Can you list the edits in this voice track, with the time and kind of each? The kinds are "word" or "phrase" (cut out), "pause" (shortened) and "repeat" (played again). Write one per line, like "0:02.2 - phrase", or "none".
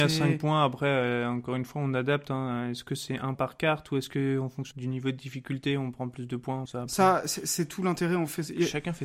0:03.3 - word
0:04.7 - word
0:06.7 - word